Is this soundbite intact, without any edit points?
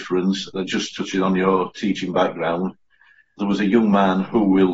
no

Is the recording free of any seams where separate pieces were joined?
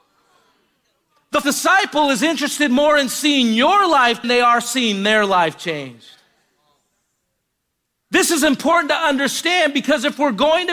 no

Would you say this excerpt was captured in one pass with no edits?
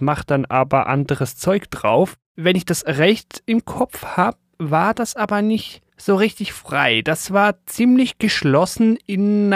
no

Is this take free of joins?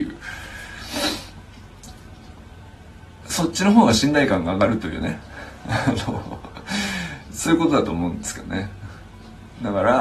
yes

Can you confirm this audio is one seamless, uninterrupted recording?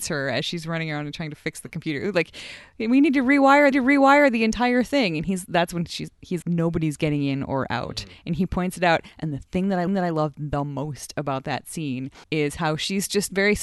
no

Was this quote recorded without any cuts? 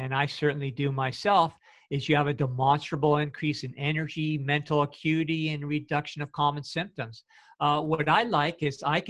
yes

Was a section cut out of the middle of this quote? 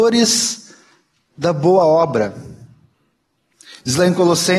no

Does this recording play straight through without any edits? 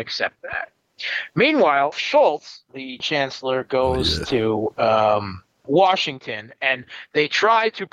no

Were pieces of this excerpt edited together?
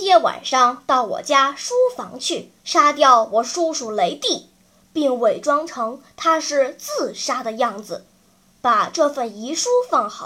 yes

